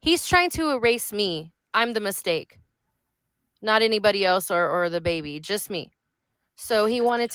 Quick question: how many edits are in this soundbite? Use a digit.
0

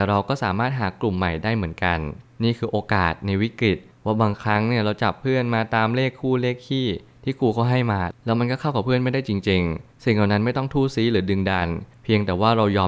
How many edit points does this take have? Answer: 0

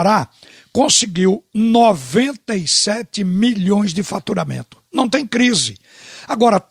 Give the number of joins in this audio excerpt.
0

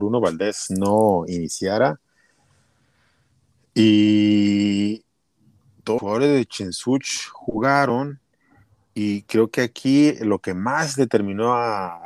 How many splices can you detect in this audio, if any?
1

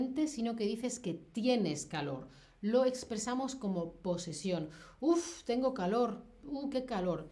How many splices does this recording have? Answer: 0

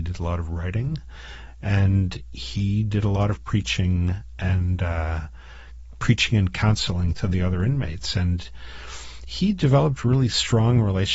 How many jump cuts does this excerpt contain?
0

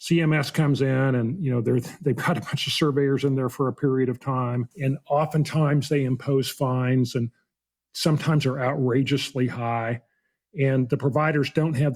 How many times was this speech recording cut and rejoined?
2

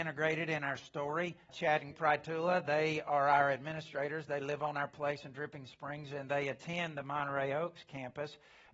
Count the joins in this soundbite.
2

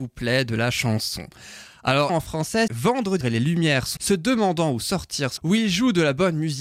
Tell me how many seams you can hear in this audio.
5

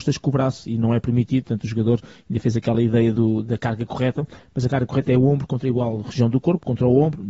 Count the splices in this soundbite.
0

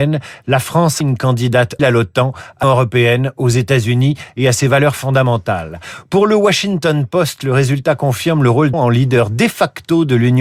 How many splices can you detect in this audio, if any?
4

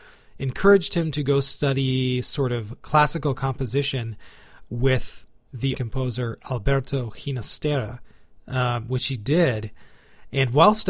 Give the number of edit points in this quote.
1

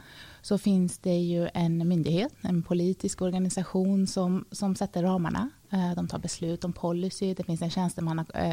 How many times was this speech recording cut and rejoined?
0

